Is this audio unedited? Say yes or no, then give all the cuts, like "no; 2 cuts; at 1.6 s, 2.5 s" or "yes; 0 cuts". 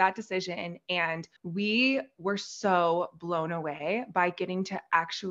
no; 1 cut; at 1.4 s